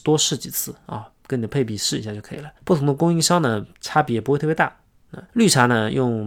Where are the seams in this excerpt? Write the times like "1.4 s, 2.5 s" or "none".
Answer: 2.6 s, 5.3 s